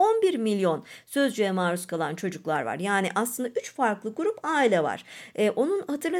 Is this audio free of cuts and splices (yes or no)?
yes